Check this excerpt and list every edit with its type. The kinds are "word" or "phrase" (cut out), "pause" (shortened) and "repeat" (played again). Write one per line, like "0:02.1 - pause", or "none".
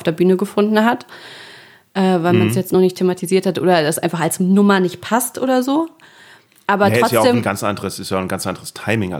none